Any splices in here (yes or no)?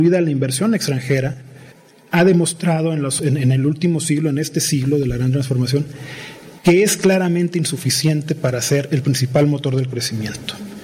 no